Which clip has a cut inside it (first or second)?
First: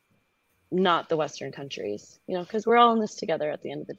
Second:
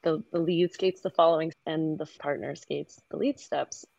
second